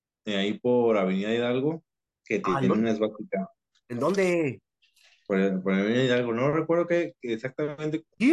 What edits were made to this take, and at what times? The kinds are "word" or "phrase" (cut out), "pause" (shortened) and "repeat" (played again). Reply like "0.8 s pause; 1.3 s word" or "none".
none

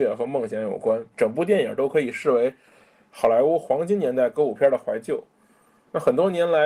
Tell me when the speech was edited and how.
1.1 s pause

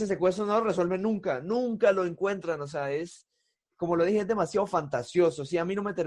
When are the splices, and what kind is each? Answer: none

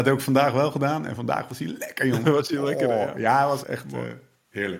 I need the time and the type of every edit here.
3.6 s word

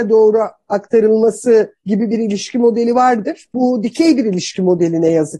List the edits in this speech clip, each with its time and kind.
1.8 s pause

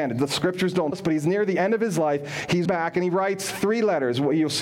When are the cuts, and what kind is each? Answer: 0.9 s word; 2.6 s word

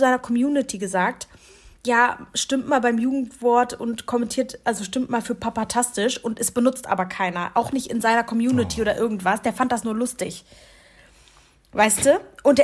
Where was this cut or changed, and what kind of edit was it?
none

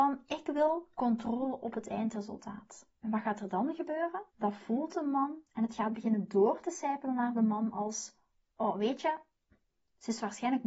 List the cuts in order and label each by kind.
2.9 s pause; 4.3 s pause; 5.5 s pause

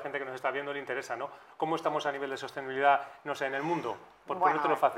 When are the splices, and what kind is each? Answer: none

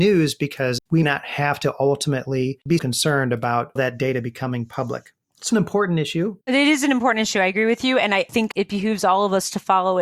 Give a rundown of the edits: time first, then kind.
1.0 s word; 2.8 s word; 3.8 s phrase; 5.5 s word; 6.4 s pause

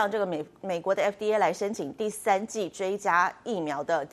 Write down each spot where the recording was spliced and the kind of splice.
none

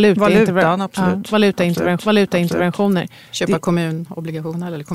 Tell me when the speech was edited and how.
2.0 s repeat

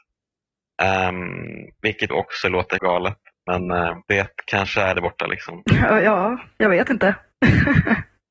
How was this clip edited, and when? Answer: 2.1 s word; 2.8 s phrase; 4.0 s pause; 4.9 s phrase

